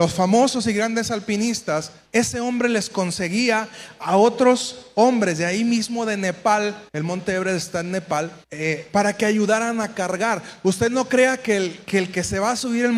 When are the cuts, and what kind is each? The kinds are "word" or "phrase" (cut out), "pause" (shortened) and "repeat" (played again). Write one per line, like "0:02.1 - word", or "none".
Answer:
0:02.0 - pause
0:06.9 - pause
0:08.4 - pause